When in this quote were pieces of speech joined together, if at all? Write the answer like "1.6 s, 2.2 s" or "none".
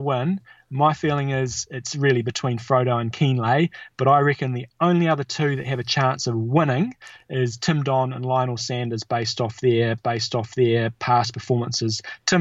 10.0 s